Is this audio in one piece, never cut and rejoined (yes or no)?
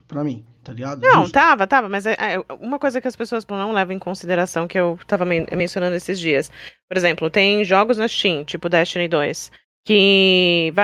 no